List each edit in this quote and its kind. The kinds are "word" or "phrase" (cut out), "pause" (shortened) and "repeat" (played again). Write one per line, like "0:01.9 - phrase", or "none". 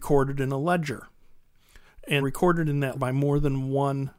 0:02.2 - word
0:02.9 - word